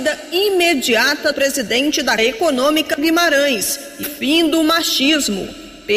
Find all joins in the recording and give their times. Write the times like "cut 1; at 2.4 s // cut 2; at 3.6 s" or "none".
cut 1; at 1.3 s // cut 2; at 2.2 s // cut 3; at 3.0 s // cut 4; at 4.0 s